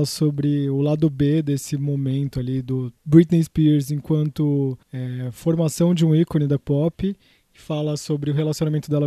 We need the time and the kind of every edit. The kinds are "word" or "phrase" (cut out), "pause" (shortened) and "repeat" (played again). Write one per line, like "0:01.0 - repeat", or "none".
0:03.0 - phrase
0:04.8 - pause
0:06.6 - word